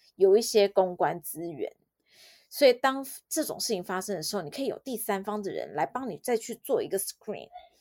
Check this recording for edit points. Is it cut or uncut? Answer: uncut